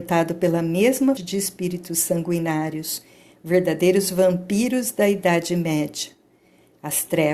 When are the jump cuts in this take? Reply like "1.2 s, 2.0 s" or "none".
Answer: 1.2 s